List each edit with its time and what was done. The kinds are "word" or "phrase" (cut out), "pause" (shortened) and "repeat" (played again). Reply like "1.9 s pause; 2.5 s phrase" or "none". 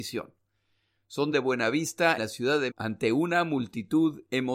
1.3 s phrase; 2.2 s word; 2.7 s word